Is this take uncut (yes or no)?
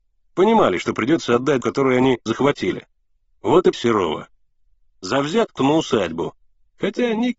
no